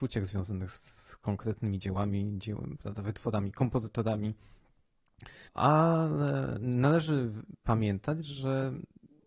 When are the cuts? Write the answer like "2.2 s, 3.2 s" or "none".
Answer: 5.4 s